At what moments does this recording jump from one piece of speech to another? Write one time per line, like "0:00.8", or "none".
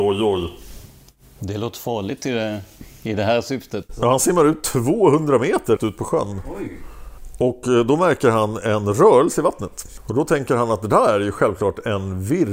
0:05.8